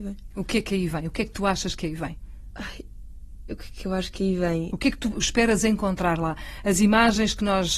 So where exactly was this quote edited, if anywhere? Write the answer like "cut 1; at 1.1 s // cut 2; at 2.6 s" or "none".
none

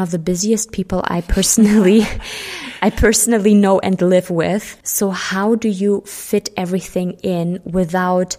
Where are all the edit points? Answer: cut 1; at 4.8 s

